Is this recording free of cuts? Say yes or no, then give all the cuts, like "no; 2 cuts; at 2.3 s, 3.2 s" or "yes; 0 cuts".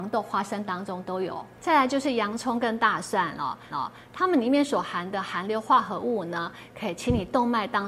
no; 2 cuts; at 1.6 s, 3.7 s